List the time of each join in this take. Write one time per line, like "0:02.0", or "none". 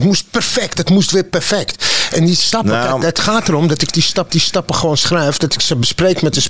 0:04.3

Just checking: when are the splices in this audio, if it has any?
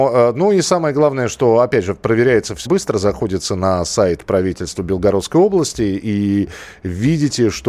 0:02.7

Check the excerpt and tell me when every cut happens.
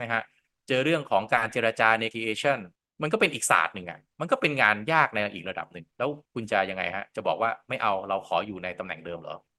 0:02.1
0:02.8
0:06.3

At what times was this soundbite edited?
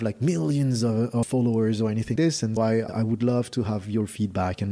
0:02.2
0:02.6
0:02.9

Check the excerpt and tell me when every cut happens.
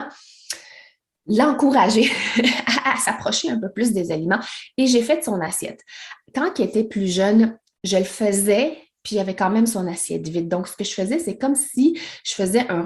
none

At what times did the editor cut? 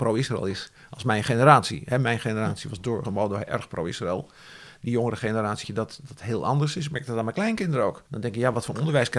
0:03.0
0:05.6
0:08.1

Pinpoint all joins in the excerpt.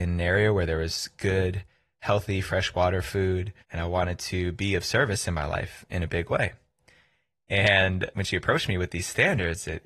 0:03.6

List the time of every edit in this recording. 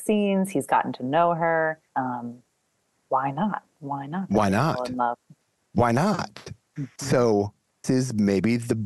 0:01.9
0:07.8

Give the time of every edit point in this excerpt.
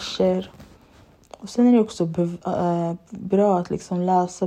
none

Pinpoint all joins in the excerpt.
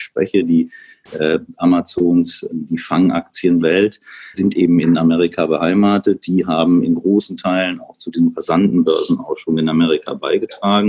0:02.5
0:03.6
0:04.3

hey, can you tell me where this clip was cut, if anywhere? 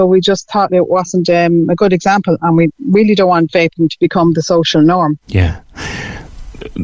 0:02.7
0:05.2

